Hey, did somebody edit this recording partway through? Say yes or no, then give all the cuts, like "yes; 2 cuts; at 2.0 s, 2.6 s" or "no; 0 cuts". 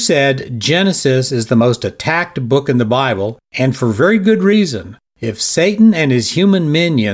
no; 0 cuts